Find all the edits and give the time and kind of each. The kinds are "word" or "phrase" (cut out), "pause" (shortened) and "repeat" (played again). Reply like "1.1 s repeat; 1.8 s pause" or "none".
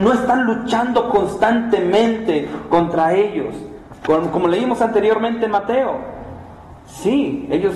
6.8 s pause